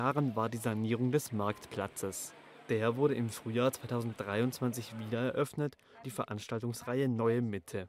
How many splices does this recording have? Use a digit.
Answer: 1